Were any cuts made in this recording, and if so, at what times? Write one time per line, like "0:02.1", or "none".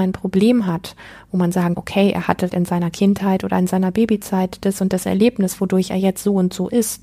0:01.7
0:02.5